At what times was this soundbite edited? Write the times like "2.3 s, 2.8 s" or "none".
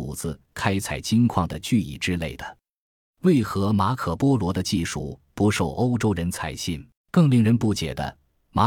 7.0 s